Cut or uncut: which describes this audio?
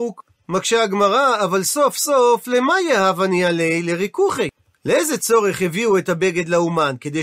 uncut